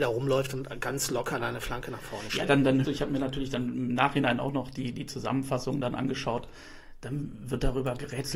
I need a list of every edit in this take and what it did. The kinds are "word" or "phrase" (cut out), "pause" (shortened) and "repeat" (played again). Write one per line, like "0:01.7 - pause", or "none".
0:02.8 - word